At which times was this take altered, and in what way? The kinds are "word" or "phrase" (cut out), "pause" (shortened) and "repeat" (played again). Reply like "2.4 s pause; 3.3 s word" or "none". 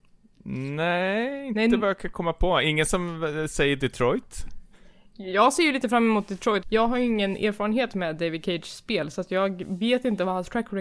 6.6 s word